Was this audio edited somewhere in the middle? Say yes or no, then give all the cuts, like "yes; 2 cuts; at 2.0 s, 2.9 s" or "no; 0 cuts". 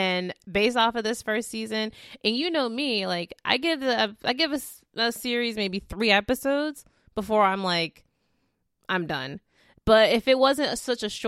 no; 0 cuts